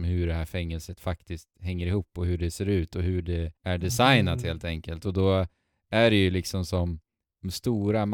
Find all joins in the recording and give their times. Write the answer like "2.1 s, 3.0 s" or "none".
3.6 s